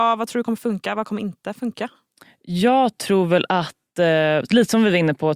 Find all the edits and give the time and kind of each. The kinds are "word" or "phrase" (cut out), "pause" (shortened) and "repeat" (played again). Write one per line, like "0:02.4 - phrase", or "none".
none